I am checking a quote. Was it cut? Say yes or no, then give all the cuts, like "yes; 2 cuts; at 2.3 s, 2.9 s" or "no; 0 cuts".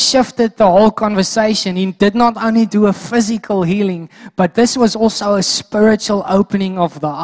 no; 0 cuts